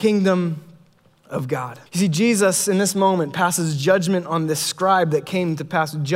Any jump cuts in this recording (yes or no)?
yes